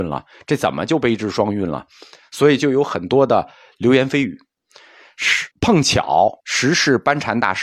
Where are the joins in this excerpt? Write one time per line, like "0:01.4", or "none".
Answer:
0:05.5
0:06.4